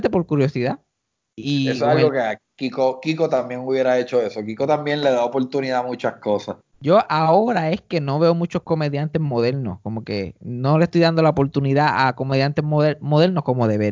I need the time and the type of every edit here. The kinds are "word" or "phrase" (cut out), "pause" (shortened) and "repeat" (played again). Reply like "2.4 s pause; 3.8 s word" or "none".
6.6 s pause